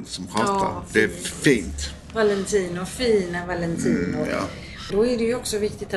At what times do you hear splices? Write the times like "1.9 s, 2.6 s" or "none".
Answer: 4.9 s